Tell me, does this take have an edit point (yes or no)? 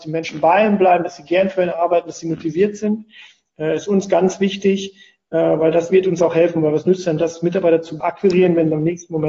no